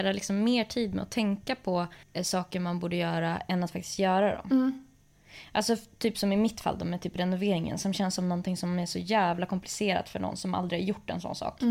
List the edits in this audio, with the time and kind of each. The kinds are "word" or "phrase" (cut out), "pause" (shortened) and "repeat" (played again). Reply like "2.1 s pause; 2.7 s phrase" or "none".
2.0 s pause